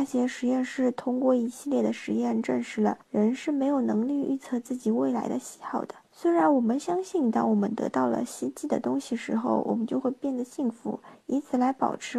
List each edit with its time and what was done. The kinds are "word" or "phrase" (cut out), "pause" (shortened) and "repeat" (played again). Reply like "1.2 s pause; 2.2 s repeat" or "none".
6.0 s pause